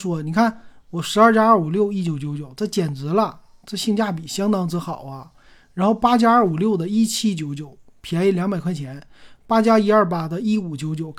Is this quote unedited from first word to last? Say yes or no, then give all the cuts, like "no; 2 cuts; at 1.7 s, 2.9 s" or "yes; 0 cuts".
yes; 0 cuts